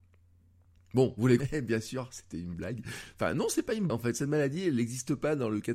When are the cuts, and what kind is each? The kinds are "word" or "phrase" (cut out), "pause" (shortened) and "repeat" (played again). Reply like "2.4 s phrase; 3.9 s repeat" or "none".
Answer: 1.4 s word; 3.9 s word